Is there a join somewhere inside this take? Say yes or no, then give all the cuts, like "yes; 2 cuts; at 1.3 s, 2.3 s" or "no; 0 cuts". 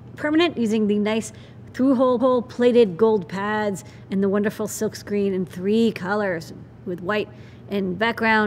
yes; 1 cut; at 2.2 s